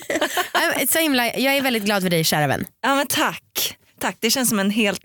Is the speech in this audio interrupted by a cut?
no; 0 cuts

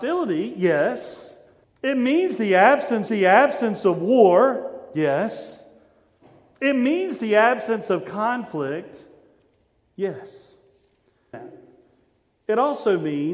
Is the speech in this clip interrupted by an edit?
yes; 3 cuts; at 1.6 s, 3.1 s, 11.3 s

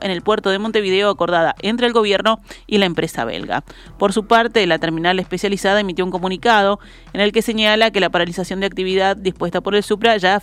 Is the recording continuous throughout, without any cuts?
yes; 0 cuts

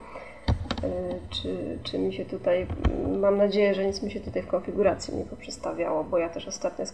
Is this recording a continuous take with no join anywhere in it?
yes; 0 cuts

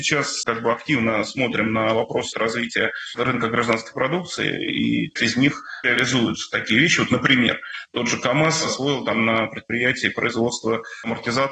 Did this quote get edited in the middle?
yes; 3 cuts; at 2.3 s, 5.2 s, 5.8 s

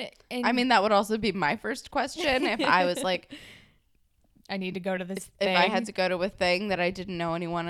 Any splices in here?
no; 0 cuts

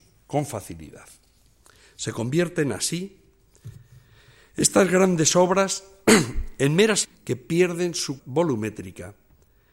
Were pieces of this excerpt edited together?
yes; 3 cuts; at 1.4 s, 7.0 s, 8.2 s

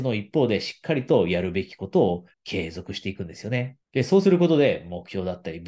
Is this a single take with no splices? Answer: no; 2 cuts; at 2.3 s, 3.8 s

